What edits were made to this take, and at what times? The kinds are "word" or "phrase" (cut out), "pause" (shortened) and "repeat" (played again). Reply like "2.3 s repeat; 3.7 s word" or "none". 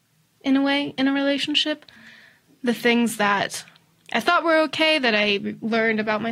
none